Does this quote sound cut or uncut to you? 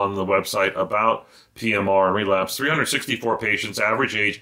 uncut